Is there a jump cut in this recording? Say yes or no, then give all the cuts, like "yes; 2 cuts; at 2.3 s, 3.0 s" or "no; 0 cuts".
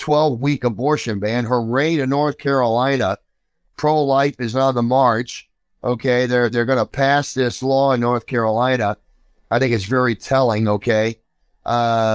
no; 0 cuts